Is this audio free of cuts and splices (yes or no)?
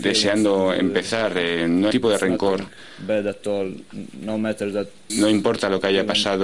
no